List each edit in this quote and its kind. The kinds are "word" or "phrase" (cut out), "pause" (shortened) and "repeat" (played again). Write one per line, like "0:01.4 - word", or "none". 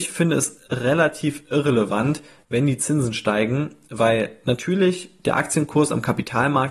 none